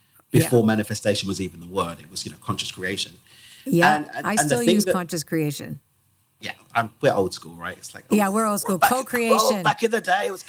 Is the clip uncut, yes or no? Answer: yes